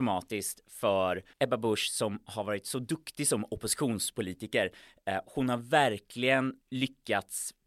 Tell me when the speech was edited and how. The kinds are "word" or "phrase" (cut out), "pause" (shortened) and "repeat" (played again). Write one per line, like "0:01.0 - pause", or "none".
0:01.3 - pause
0:06.6 - pause